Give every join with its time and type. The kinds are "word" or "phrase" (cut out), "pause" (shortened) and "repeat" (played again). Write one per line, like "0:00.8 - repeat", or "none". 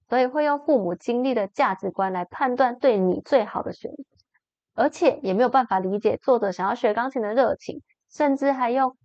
none